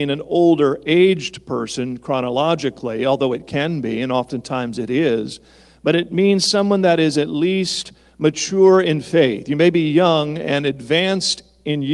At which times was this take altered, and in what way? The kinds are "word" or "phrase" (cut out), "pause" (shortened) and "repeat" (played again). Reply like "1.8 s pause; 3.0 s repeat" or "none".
none